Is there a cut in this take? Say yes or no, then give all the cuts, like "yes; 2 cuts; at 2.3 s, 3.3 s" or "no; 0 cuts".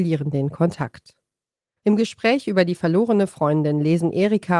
no; 0 cuts